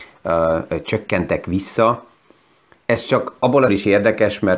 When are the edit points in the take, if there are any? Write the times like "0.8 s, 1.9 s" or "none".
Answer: 3.7 s